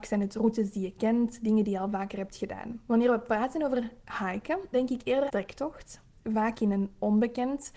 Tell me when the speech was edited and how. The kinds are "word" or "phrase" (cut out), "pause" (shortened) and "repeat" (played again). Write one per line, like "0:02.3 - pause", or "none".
0:02.8 - pause
0:04.7 - word
0:05.3 - phrase